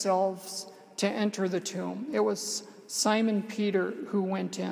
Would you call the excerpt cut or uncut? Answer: uncut